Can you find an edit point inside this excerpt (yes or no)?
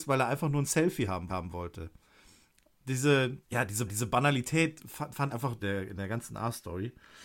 yes